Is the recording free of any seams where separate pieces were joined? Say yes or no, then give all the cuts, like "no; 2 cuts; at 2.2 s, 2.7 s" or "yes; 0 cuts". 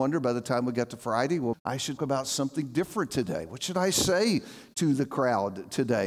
no; 2 cuts; at 1.5 s, 2.0 s